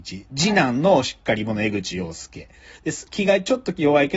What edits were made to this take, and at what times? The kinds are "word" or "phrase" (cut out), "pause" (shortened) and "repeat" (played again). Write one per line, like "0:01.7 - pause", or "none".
none